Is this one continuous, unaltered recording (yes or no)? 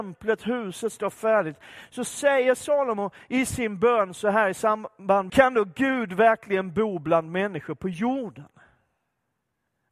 no